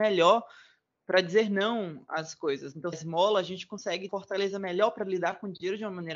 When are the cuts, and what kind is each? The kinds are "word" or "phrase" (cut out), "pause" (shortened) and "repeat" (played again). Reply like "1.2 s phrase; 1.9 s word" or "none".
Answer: 2.9 s phrase; 4.1 s phrase